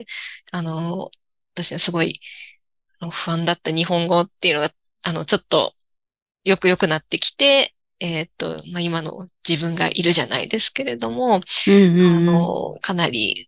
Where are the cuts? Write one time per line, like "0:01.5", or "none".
none

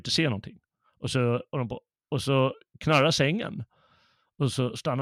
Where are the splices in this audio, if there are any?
none

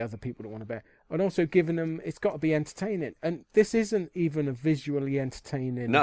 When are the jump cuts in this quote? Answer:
none

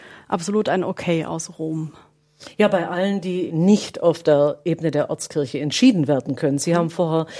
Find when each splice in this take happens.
0:03.5

